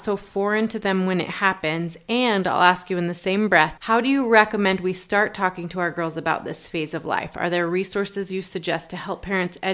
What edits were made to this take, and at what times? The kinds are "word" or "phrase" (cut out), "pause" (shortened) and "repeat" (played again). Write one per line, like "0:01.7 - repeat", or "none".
none

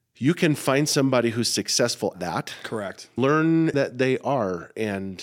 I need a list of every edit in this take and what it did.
0:02.1 - word
0:03.2 - word
0:03.7 - word

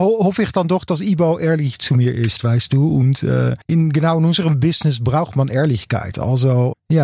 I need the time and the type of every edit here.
0:03.6 - pause

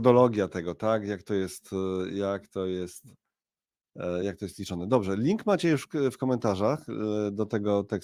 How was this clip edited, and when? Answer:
none

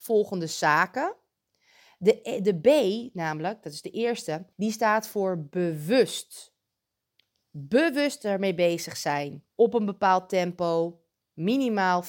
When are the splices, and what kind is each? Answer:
0:04.5 - pause
0:09.5 - pause

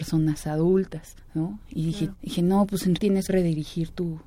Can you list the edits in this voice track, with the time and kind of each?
0:02.1 - word
0:03.0 - word
0:03.3 - word

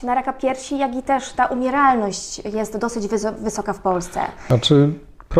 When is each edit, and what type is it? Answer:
none

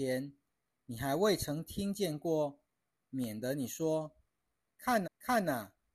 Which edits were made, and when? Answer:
0:05.0 - repeat

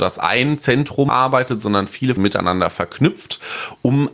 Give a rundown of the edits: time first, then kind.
0:01.1 - word
0:02.2 - phrase

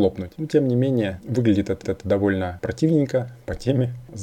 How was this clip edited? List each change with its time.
0:01.8 - repeat

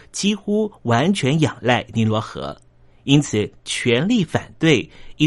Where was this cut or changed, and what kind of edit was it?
none

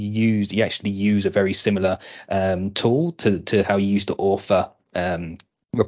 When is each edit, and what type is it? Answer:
none

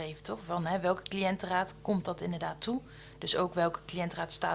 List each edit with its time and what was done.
none

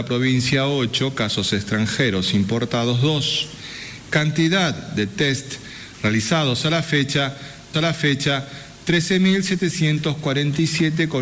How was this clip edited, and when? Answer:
0:07.7 - repeat

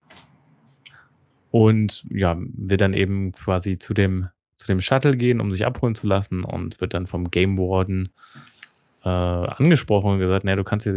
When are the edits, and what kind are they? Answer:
none

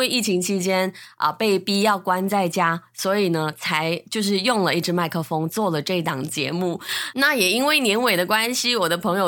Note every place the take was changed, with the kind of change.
none

